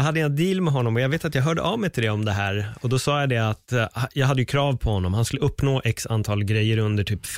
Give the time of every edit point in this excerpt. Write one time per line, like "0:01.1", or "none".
none